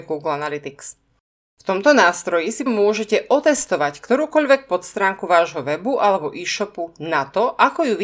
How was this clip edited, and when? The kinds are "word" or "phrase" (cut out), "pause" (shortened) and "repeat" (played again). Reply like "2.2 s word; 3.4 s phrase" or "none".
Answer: 2.7 s word